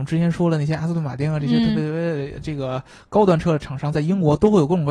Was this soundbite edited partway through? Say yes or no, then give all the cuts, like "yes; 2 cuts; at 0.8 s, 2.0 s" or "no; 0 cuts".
no; 0 cuts